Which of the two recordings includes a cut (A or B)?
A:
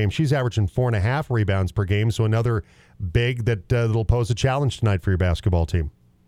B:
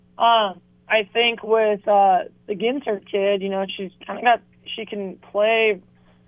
B